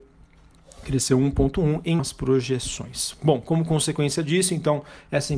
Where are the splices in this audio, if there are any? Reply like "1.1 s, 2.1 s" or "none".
2.0 s